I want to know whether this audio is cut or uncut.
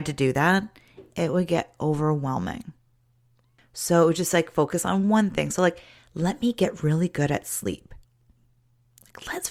uncut